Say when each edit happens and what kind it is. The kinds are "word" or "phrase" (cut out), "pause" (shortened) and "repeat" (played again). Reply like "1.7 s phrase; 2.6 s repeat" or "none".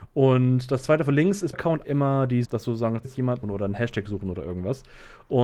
1.5 s phrase; 1.8 s word; 2.4 s word; 3.0 s phrase; 3.4 s word